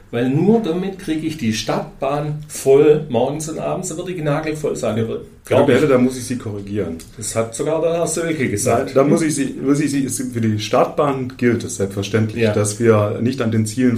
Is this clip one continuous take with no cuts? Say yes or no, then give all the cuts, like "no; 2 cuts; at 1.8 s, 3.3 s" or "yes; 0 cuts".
yes; 0 cuts